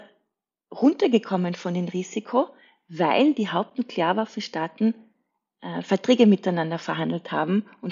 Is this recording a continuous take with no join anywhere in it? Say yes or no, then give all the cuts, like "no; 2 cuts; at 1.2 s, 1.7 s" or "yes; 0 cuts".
yes; 0 cuts